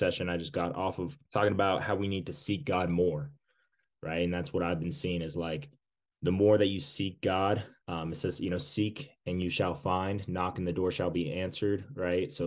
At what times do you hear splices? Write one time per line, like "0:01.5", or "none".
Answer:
0:01.3
0:07.8